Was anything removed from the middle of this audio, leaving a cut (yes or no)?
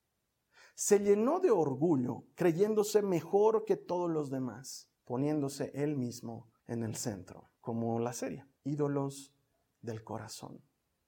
yes